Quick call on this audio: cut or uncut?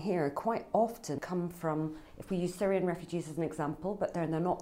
cut